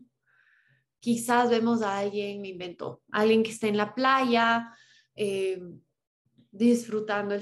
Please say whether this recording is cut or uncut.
uncut